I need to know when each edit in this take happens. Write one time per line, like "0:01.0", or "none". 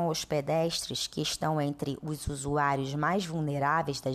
none